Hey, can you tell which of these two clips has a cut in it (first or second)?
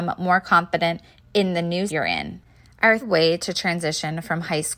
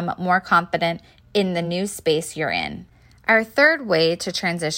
first